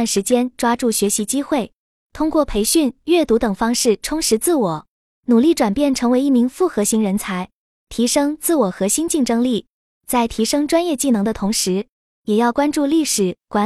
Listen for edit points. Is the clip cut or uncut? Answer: uncut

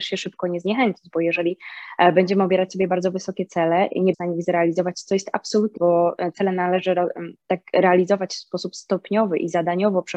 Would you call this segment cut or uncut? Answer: cut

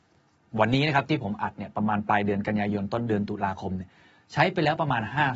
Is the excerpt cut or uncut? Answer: uncut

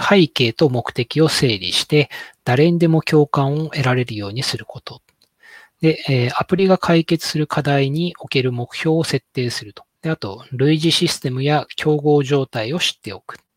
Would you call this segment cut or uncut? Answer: cut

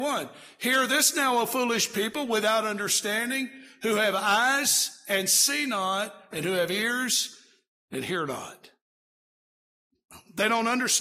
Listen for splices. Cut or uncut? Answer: uncut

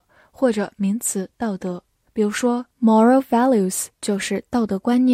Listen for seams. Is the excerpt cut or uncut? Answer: cut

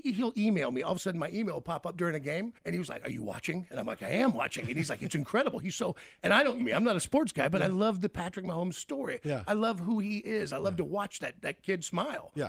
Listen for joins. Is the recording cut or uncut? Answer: cut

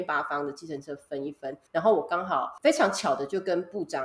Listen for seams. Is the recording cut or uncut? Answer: cut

